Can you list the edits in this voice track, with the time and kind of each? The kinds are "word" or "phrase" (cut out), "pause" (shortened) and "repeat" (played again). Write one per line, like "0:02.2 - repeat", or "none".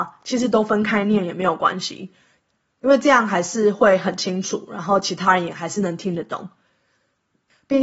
none